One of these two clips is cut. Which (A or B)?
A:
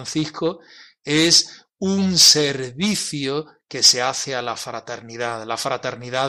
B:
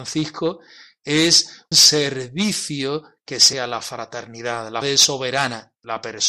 B